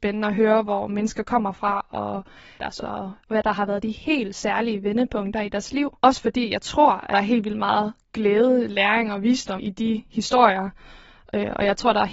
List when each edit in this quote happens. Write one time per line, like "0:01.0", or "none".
0:02.8
0:06.0
0:09.6

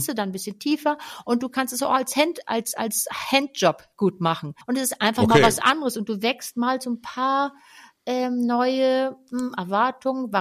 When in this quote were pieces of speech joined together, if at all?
0:04.6

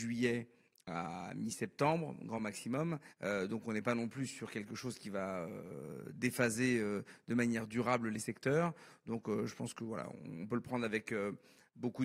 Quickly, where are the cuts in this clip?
0:03.1

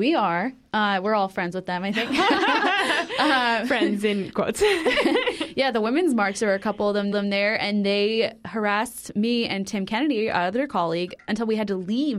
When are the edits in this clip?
0:07.1

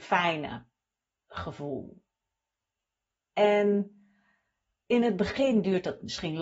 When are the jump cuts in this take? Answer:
none

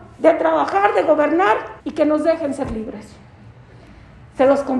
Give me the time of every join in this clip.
0:01.8

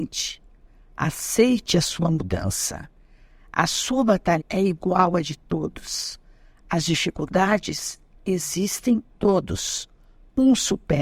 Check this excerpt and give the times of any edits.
0:04.4
0:09.1

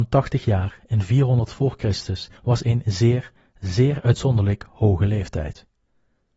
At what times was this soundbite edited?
0:02.4

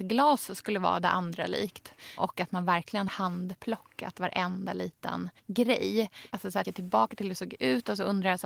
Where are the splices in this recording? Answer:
0:03.1
0:05.4
0:06.6

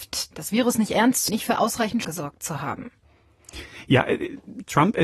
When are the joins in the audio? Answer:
0:01.3
0:02.0

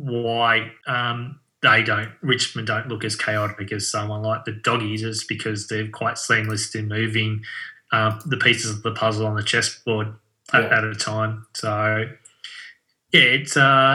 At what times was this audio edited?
none

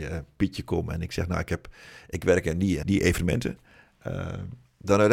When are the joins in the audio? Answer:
0:02.8

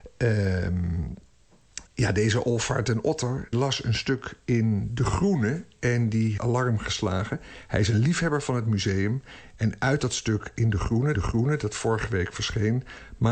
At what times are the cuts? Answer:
0:01.9
0:03.5
0:06.4
0:11.1

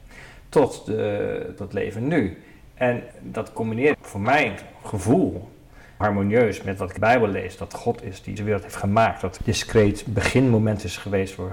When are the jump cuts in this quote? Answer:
0:01.6
0:03.1
0:03.9
0:06.0
0:07.0
0:07.7
0:08.4
0:09.4

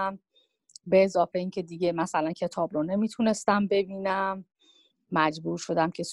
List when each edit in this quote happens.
none

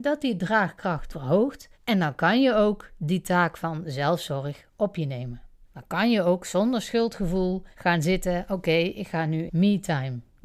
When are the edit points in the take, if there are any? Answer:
0:01.1
0:01.7
0:05.7
0:07.7
0:09.5

